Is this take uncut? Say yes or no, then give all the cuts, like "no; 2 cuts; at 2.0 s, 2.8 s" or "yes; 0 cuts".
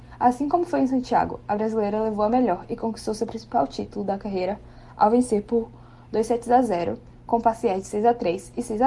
yes; 0 cuts